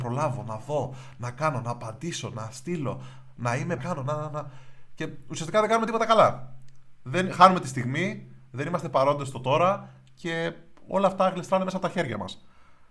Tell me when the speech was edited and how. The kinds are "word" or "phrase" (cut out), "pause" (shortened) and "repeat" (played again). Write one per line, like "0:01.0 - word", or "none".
0:03.8 - phrase